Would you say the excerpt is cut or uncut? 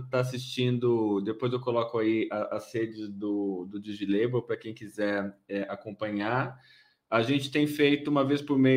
uncut